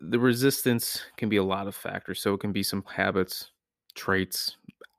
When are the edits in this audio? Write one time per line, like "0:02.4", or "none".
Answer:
0:02.8